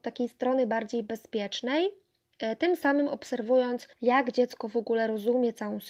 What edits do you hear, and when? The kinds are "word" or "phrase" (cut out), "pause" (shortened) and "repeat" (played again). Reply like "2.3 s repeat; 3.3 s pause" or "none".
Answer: 3.9 s pause